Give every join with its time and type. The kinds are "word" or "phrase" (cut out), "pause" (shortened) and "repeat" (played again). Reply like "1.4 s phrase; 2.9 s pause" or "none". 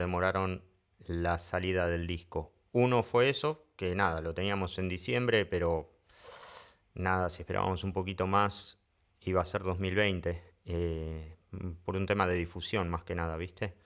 none